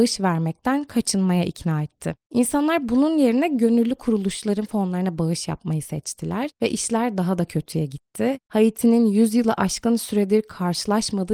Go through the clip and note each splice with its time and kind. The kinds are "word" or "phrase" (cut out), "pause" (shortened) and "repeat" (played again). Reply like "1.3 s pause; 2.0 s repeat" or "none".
none